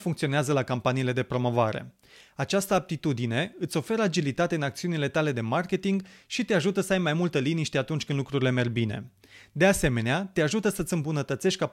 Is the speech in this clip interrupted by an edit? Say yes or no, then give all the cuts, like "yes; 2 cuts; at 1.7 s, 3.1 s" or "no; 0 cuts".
no; 0 cuts